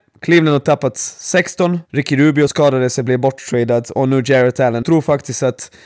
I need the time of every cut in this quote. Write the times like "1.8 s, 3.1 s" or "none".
1.9 s, 2.5 s, 4.8 s